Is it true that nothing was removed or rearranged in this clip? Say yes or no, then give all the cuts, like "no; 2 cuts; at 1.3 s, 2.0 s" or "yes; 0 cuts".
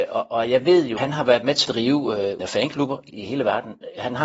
no; 4 cuts; at 1.0 s, 1.6 s, 2.4 s, 3.1 s